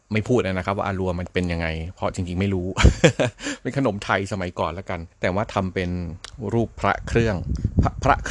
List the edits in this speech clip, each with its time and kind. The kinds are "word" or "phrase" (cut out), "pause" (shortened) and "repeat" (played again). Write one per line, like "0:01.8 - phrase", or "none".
0:05.1 - pause